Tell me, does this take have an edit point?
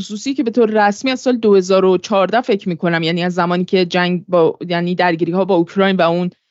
no; 0 cuts

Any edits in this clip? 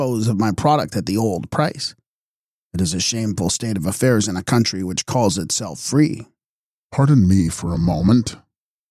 no; 0 cuts

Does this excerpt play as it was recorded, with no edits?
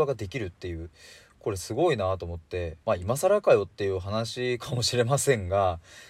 no; 1 cut; at 2.8 s

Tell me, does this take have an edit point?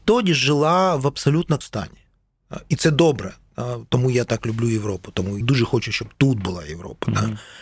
yes; 2 cuts; at 1.6 s, 5.4 s

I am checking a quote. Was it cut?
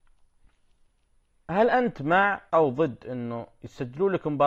yes; 1 cut; at 2.5 s

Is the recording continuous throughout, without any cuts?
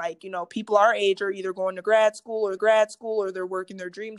no; 1 cut; at 2.6 s

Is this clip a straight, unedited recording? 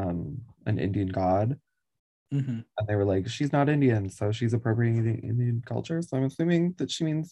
yes; 0 cuts

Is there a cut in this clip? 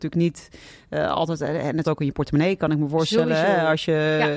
yes; 1 cut; at 1.8 s

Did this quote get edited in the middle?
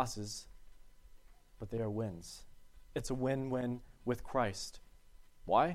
no; 0 cuts

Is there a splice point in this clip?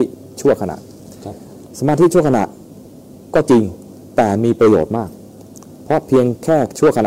no; 0 cuts

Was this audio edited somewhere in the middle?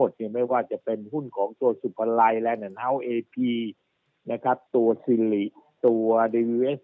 no; 0 cuts

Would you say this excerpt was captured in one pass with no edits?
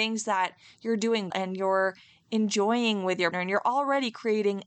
no; 2 cuts; at 1.3 s, 3.3 s

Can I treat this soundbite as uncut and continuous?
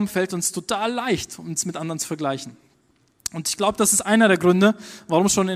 yes; 0 cuts

